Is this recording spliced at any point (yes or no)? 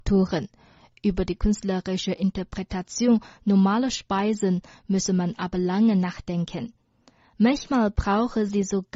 no